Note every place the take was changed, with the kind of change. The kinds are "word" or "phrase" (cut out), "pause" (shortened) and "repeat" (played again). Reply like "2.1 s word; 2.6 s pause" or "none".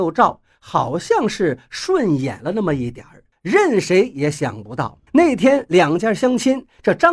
3.3 s pause; 5.1 s pause